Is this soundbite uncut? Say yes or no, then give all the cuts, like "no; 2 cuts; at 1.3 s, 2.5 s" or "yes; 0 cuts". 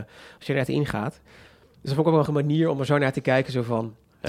no; 1 cut; at 2.3 s